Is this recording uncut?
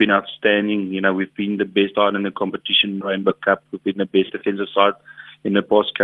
no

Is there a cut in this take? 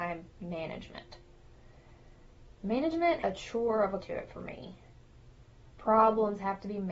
yes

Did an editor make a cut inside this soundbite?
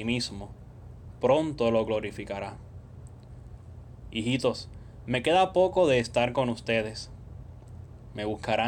no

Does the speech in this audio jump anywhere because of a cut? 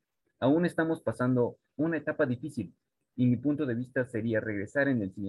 no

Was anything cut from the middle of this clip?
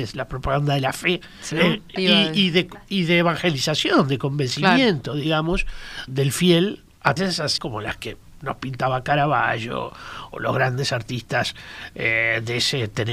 yes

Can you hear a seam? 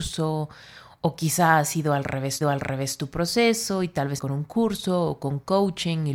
yes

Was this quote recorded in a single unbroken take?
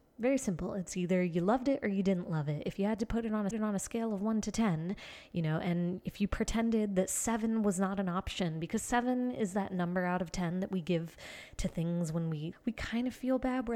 no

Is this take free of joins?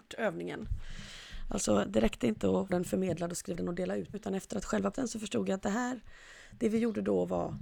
no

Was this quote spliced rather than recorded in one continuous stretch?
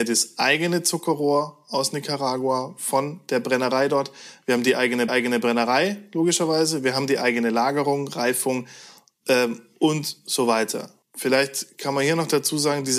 yes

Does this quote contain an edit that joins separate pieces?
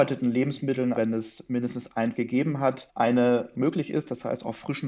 yes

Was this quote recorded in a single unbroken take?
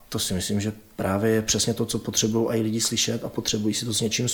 yes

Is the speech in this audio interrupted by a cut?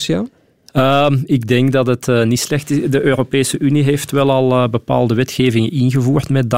no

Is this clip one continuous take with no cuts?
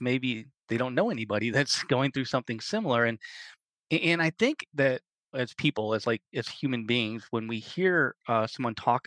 yes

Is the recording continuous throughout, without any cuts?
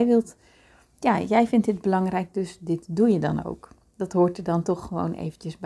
yes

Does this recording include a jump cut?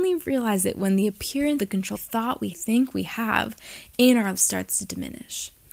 yes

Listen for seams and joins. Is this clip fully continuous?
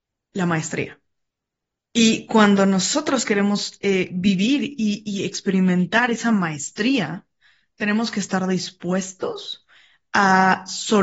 yes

